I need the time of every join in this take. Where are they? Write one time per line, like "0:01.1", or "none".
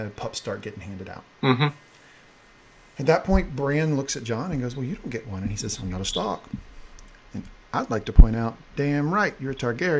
none